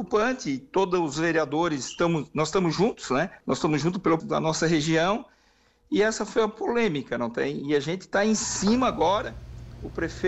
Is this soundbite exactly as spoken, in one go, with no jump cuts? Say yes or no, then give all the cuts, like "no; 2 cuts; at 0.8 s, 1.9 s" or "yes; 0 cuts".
no; 2 cuts; at 3.4 s, 4.2 s